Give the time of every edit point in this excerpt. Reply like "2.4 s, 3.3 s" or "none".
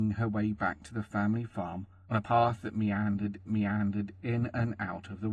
3.5 s